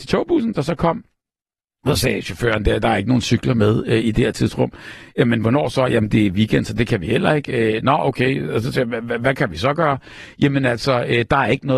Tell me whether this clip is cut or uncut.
uncut